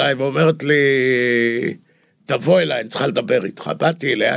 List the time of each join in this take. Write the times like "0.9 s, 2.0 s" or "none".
none

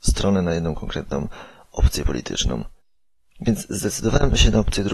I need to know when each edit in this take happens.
2.8 s

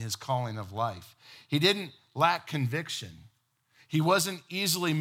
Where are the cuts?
none

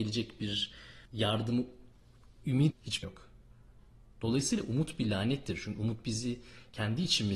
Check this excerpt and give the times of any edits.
1.1 s, 2.7 s, 3.0 s

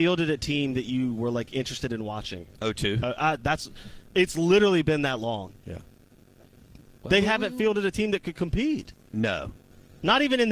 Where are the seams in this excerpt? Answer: 7.0 s

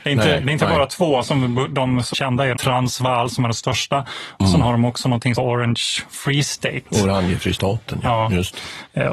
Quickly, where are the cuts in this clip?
2.1 s, 2.6 s, 5.4 s

